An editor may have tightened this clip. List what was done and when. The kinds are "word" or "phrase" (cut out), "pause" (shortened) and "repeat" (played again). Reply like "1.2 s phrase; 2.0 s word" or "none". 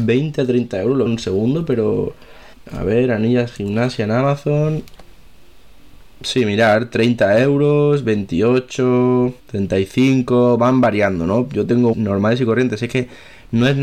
1.1 s phrase; 2.5 s pause; 9.4 s pause; 11.9 s word